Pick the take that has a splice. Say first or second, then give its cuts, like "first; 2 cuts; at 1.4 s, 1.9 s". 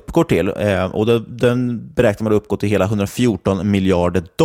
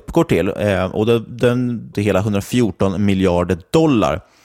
second; 1 cut; at 1.9 s